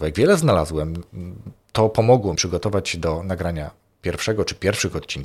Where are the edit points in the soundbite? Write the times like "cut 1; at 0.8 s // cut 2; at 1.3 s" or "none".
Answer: cut 1; at 2.4 s